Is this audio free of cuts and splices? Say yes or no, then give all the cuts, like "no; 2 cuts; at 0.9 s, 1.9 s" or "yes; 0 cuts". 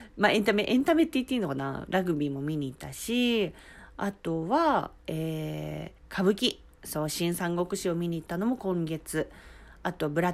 no; 1 cut; at 6.0 s